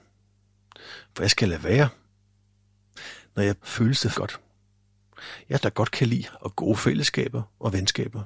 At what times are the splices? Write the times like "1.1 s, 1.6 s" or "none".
3.6 s, 4.1 s, 5.6 s, 6.3 s